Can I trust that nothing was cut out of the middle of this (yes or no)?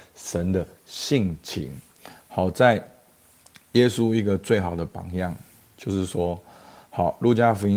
yes